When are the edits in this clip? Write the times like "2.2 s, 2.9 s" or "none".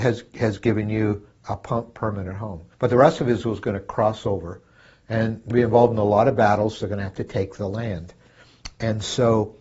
2.7 s, 5.5 s